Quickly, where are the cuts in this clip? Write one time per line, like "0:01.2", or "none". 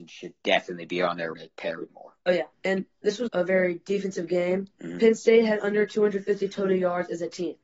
0:01.3
0:01.9
0:02.5
0:03.3
0:04.7

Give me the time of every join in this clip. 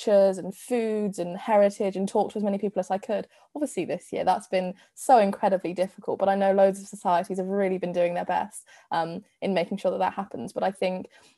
none

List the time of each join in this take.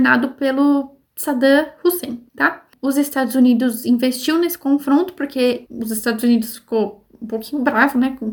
0:01.1
0:02.3

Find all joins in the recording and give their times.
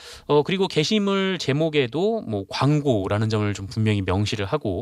none

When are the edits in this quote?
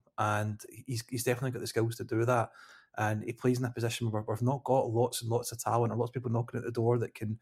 none

